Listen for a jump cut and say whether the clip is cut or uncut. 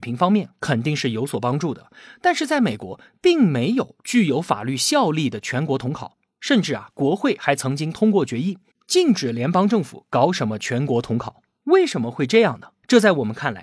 uncut